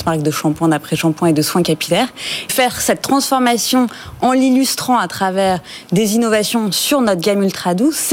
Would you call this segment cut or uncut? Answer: cut